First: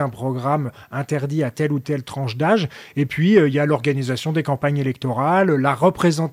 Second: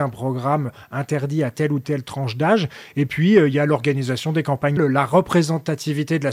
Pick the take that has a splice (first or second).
second